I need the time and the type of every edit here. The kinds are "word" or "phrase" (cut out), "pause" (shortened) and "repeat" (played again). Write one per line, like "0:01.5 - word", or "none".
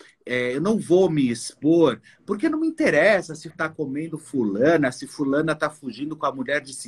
0:03.5 - word